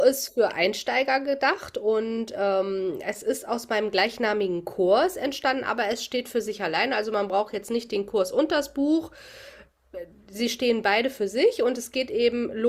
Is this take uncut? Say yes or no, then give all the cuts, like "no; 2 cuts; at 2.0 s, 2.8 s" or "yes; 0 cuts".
yes; 0 cuts